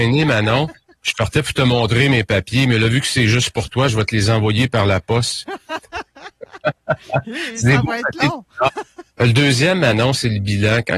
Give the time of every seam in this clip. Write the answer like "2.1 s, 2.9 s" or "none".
0.9 s, 9.1 s